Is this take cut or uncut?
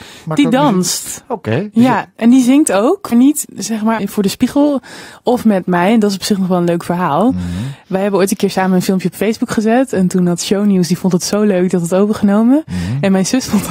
cut